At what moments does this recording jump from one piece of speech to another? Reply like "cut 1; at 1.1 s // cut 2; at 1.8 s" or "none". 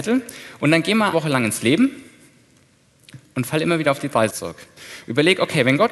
cut 1; at 1.1 s // cut 2; at 4.3 s